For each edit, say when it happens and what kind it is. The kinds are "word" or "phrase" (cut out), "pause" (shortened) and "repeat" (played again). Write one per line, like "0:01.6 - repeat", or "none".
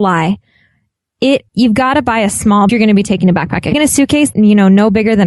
0:01.5 - pause
0:02.7 - phrase
0:03.7 - phrase
0:04.3 - phrase